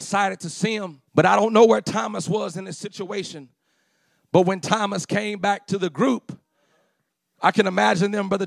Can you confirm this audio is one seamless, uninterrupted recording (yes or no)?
no